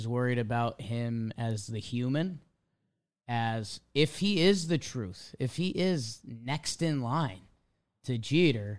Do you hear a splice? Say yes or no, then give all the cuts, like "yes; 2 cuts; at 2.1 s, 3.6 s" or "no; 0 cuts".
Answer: no; 0 cuts